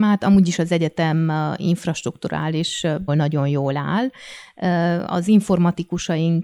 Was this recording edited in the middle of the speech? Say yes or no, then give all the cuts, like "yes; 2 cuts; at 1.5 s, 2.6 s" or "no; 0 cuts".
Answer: yes; 1 cut; at 3.1 s